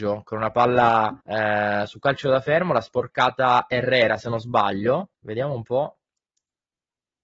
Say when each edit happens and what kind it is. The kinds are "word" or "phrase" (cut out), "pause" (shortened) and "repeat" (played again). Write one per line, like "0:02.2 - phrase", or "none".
0:01.2 - pause
0:05.1 - pause

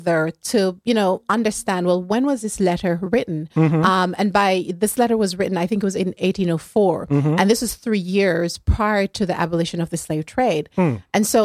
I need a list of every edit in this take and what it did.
none

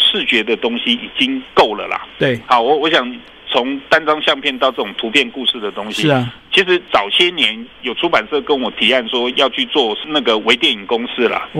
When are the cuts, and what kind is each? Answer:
none

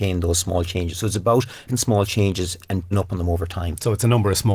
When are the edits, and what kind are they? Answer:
0:01.7 - word
0:02.9 - word

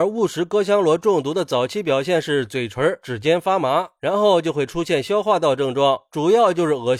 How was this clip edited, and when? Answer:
0:03.0 - phrase

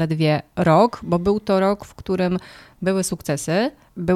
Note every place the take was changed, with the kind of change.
none

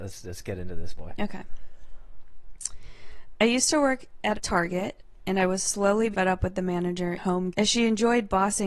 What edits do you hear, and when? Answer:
0:01.0 - word
0:04.3 - word
0:06.1 - word
0:07.2 - word
0:07.5 - word

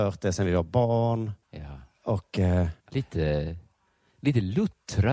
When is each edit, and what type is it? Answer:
0:01.4 - pause
0:02.8 - pause

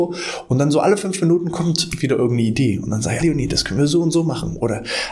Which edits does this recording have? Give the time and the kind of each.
0:03.2 - word

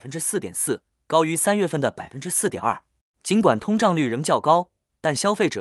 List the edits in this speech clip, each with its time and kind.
none

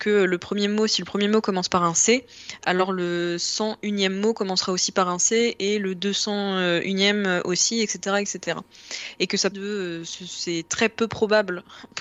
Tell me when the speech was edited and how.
0:09.5 - phrase

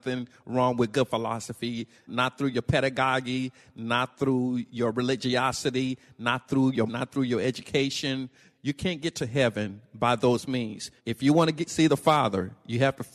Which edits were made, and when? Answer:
0:02.1 - word
0:06.9 - word
0:11.0 - pause

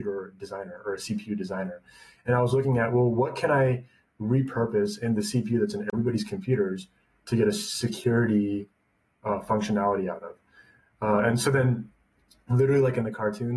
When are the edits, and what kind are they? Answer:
none

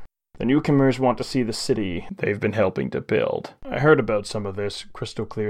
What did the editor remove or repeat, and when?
0:03.6 - pause

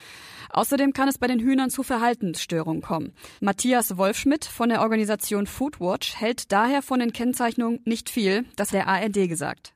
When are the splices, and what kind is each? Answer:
0:03.4 - pause
0:08.7 - phrase

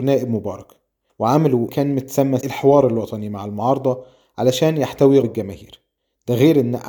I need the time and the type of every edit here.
0:01.7 - word
0:02.4 - word
0:05.2 - word

